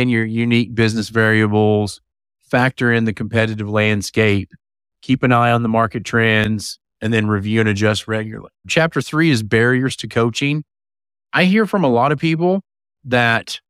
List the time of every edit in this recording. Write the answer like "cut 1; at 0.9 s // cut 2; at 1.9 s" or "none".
none